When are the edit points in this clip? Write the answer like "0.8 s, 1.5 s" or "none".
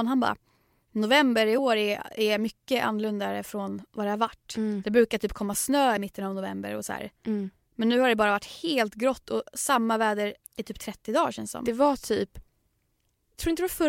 none